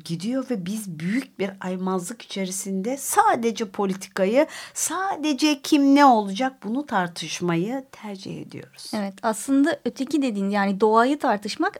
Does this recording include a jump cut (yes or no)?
no